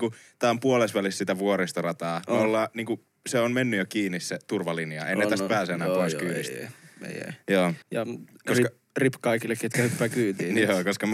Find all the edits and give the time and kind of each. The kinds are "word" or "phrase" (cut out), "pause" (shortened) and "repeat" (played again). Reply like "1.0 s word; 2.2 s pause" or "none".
7.8 s pause

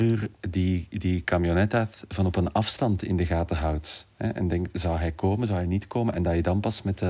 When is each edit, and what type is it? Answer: none

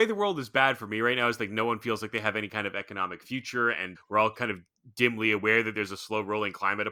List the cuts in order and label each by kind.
3.9 s word

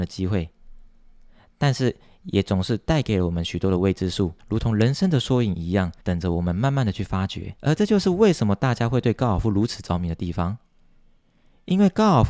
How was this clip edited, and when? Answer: 4.4 s pause; 6.0 s pause; 7.6 s pause

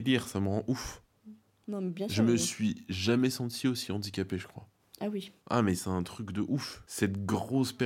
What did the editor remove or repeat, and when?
5.4 s pause

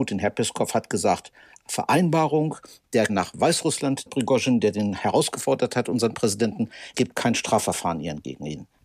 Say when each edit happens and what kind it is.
3.1 s word; 4.1 s word; 6.9 s word

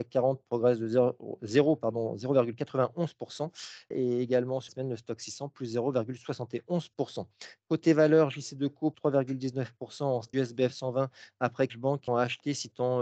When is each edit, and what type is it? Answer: 3.9 s word; 4.7 s word; 8.9 s word; 10.3 s phrase; 11.7 s phrase; 12.1 s phrase

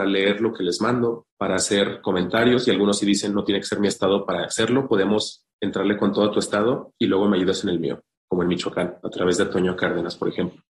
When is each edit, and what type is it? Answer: 1.3 s pause; 9.0 s pause

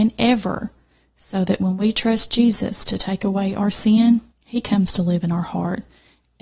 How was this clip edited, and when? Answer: 4.3 s pause

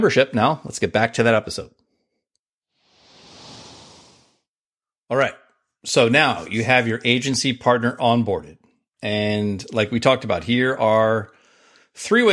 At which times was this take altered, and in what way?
none

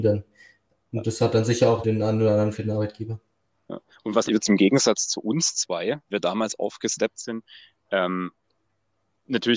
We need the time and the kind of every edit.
1.8 s word; 2.5 s word; 4.3 s word; 6.1 s word

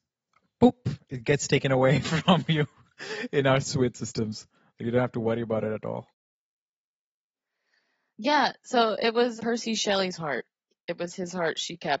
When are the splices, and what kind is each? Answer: 3.6 s word; 9.4 s word

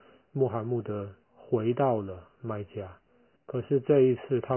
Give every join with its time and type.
1.2 s pause; 3.4 s pause

